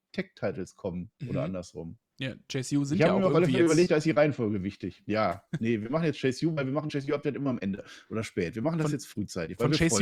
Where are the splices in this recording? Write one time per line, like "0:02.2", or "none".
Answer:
0:01.2
0:02.1